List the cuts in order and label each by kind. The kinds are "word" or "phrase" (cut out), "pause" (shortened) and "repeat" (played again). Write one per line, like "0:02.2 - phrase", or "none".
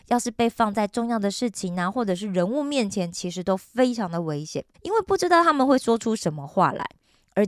0:04.7 - pause